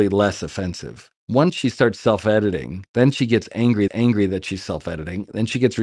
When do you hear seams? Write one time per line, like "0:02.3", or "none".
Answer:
0:01.2
0:02.9
0:03.9